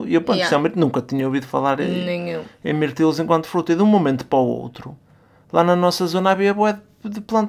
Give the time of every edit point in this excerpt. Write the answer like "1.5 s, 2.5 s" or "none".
none

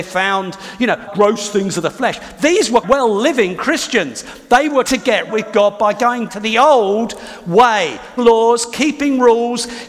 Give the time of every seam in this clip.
1.1 s, 2.8 s, 4.8 s, 5.3 s, 6.3 s, 8.2 s

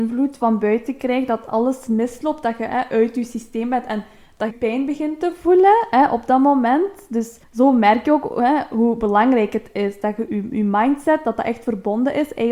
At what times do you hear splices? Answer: 4.5 s, 7.4 s, 10.3 s

